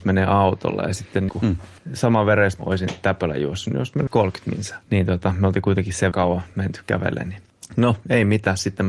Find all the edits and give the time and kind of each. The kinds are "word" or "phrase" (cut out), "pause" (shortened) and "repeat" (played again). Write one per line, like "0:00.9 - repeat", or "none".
0:01.3 - word
0:02.6 - phrase
0:04.1 - word
0:04.8 - pause
0:06.1 - word